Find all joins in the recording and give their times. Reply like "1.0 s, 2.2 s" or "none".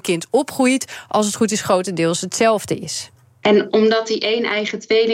none